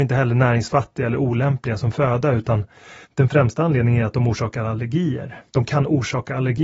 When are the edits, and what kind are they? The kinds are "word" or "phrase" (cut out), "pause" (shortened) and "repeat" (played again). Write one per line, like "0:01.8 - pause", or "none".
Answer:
0:03.0 - pause
0:05.5 - pause

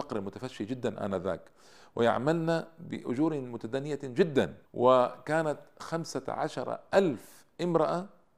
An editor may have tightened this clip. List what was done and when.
0:04.7 - pause

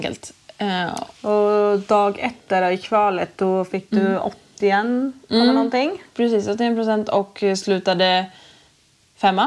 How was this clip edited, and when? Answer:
0:01.2 - pause

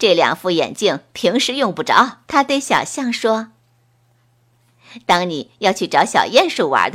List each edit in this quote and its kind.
0:02.3 - pause

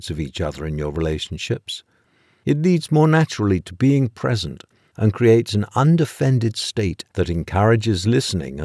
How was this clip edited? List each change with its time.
none

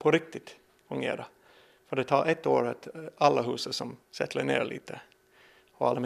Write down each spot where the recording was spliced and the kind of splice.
0:04.0 - pause

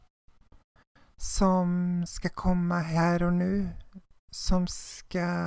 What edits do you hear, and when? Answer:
none

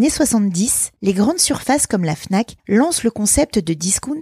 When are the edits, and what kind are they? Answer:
none

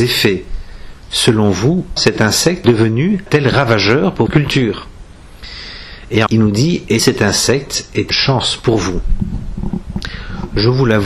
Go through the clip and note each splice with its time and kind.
0:02.0 - word
0:02.6 - word
0:03.3 - word
0:04.3 - word
0:06.3 - word
0:07.0 - word
0:08.1 - word

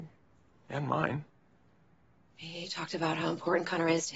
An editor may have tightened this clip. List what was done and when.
none

